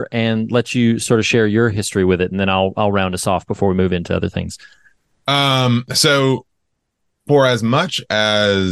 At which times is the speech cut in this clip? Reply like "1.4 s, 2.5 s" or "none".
none